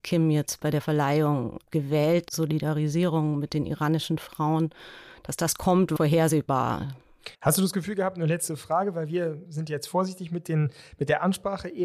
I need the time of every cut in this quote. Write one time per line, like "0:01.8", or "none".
0:02.3
0:06.0
0:07.3
0:09.5